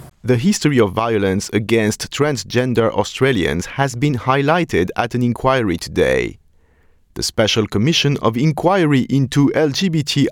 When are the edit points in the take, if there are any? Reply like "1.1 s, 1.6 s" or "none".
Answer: none